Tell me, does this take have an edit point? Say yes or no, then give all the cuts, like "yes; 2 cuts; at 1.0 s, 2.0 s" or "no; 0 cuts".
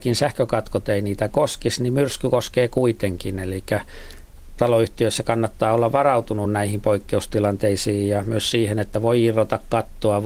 no; 0 cuts